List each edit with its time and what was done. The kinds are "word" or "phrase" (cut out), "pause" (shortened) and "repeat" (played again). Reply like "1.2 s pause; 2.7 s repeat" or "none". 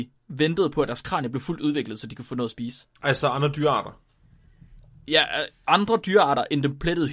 2.9 s pause